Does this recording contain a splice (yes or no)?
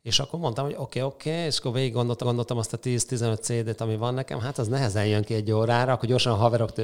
yes